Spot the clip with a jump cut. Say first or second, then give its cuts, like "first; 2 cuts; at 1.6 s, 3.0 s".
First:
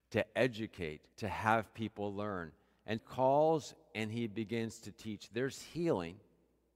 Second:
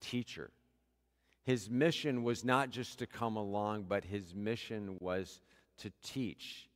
first; 2 cuts; at 1.1 s, 3.0 s